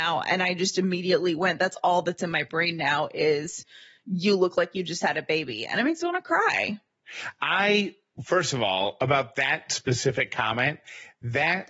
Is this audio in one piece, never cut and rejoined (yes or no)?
yes